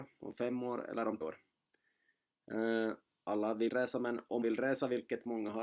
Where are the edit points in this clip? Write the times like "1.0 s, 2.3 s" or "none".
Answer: 1.2 s, 3.7 s, 4.4 s